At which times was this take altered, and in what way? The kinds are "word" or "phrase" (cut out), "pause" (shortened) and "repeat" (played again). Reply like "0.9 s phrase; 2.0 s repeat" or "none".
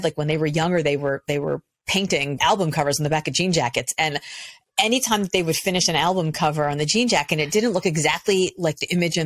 2.4 s word